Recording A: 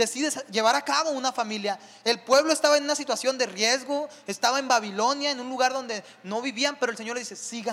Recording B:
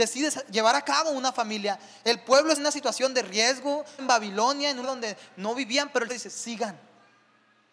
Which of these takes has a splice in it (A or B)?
B